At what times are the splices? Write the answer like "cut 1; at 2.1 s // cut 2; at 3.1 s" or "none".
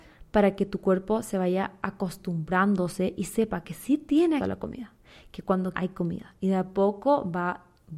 cut 1; at 4.4 s // cut 2; at 5.7 s